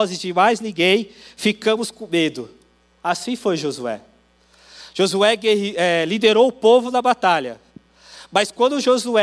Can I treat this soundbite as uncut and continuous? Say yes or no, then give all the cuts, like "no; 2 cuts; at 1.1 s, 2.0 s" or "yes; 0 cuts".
yes; 0 cuts